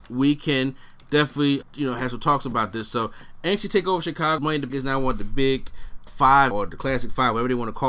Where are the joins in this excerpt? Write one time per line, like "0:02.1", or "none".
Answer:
0:01.6
0:04.4
0:04.7
0:06.1
0:06.5